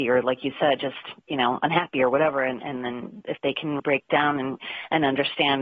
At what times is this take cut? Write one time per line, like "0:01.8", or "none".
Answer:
0:03.8